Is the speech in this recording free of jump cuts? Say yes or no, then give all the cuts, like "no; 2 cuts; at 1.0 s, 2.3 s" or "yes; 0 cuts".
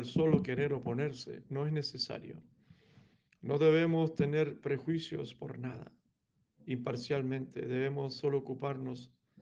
yes; 0 cuts